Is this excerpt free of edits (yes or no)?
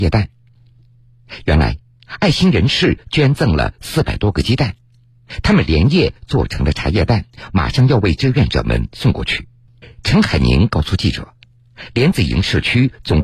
no